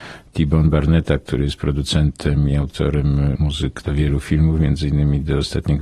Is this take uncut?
no; 1 cut; at 3.8 s

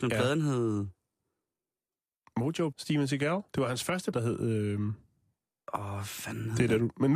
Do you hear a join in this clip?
yes; 3 cuts; at 2.7 s, 3.5 s, 4.1 s

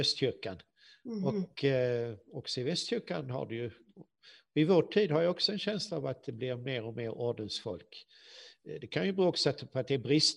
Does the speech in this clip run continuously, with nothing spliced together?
yes; 0 cuts

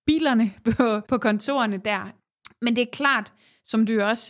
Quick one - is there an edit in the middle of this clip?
yes; 1 cut; at 1.1 s

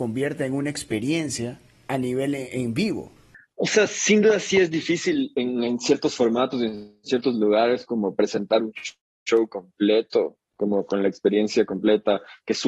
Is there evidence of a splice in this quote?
no; 0 cuts

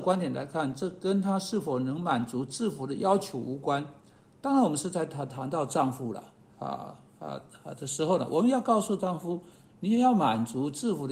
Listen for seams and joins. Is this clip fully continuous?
yes; 0 cuts

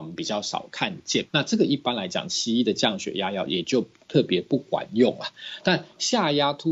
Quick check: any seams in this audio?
yes; 1 cut; at 1.3 s

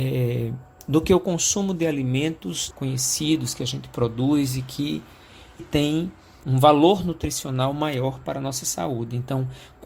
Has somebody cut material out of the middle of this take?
yes; 3 cuts; at 2.7 s, 5.6 s, 6.4 s

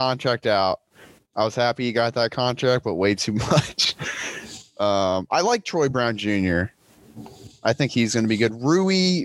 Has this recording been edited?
no; 0 cuts

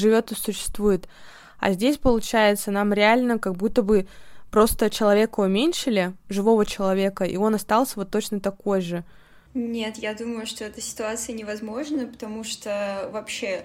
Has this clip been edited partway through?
no; 0 cuts

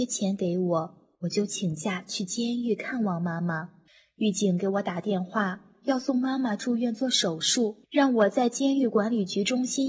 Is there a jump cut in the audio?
yes; 3 cuts; at 1.1 s, 3.9 s, 7.8 s

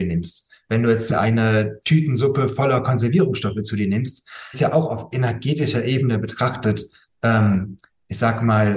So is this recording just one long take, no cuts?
no; 2 cuts; at 1.1 s, 4.5 s

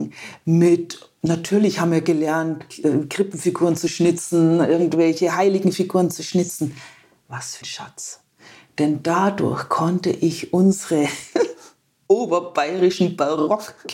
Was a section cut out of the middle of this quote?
yes; 1 cut; at 7.6 s

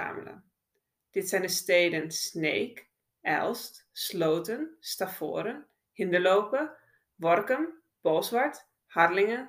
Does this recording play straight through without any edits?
no; 1 cut; at 7.9 s

